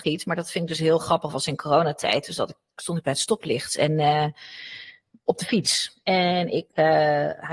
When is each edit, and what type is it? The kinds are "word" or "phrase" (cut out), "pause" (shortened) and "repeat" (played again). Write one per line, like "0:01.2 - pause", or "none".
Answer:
none